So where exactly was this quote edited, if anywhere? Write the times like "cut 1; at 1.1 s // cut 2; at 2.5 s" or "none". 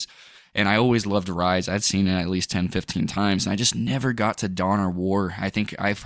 none